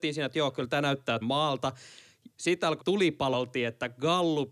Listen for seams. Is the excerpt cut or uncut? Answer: cut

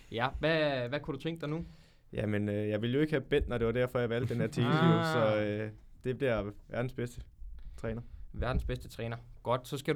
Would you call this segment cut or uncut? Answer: uncut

